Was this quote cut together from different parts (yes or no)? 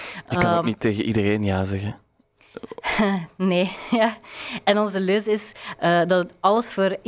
no